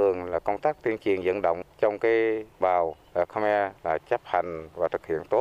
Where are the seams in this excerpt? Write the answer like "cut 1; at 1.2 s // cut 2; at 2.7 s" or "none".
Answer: cut 1; at 2.6 s // cut 2; at 3.8 s